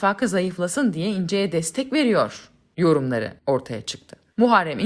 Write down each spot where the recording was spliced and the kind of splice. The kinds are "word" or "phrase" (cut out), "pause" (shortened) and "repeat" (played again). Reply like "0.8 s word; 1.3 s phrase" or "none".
none